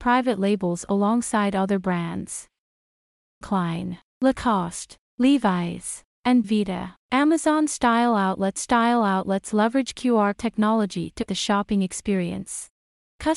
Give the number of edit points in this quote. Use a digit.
6